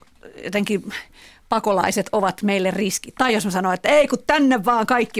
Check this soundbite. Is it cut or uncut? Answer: uncut